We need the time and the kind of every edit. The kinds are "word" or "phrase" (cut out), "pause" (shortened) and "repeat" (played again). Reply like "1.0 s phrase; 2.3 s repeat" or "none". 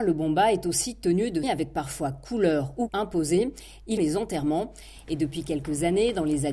1.4 s word; 2.9 s word; 4.0 s phrase